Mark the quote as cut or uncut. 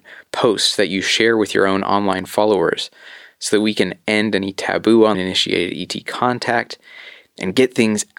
cut